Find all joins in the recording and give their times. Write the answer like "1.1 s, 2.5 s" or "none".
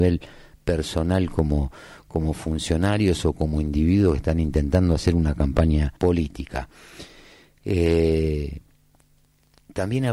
6.0 s